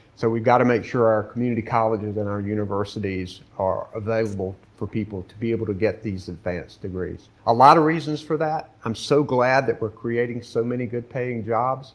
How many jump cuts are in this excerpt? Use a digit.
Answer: 1